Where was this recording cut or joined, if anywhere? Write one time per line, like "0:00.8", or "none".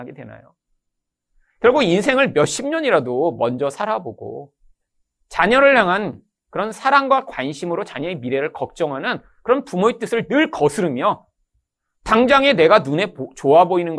none